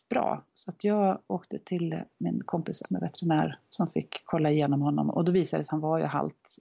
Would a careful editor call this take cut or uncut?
cut